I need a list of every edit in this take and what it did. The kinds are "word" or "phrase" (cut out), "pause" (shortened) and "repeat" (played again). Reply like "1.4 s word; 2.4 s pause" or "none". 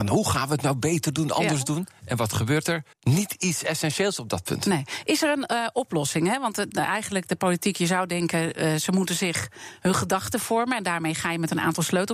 2.9 s pause